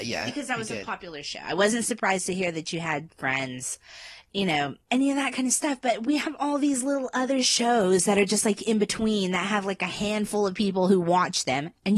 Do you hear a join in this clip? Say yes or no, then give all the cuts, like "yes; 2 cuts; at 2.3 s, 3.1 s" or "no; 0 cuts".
yes; 1 cut; at 4.8 s